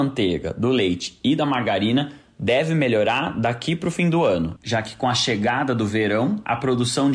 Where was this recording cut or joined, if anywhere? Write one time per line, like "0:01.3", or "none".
none